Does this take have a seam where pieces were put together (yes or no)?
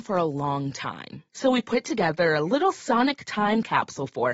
no